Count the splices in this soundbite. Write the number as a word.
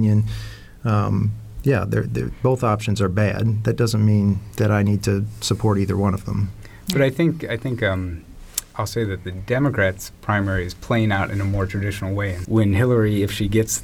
one